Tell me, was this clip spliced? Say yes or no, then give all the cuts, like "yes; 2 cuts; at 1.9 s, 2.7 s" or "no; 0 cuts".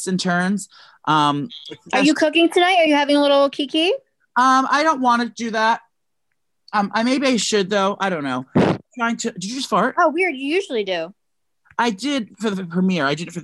no; 0 cuts